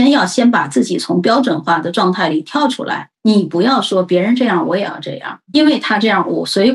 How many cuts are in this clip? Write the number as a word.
one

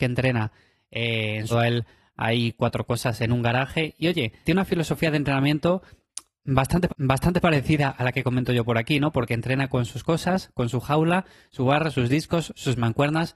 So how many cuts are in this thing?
three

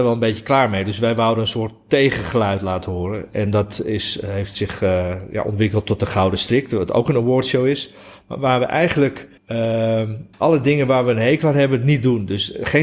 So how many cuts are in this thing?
two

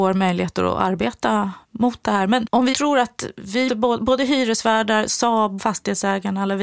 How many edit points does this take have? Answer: four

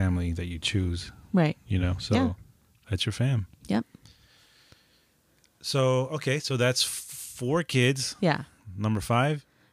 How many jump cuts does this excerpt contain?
zero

